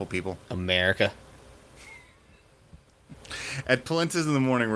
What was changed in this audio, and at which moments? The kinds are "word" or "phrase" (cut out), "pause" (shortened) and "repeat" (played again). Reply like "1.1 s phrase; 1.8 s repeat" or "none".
3.6 s word